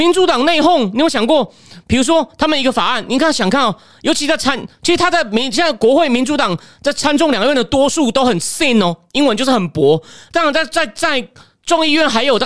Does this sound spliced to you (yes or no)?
no